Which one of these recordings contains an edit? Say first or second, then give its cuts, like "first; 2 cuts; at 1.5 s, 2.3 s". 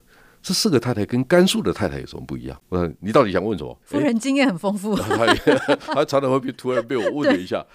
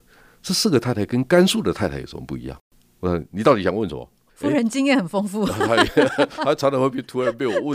first; 2 cuts; at 2.6 s, 3.8 s